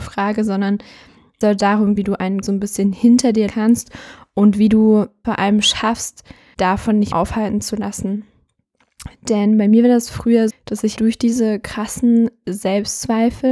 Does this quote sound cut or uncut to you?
cut